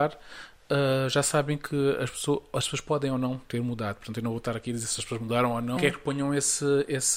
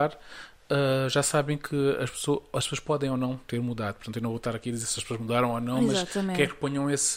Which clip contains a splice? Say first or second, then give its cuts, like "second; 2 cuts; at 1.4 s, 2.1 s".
first; 1 cut; at 5.8 s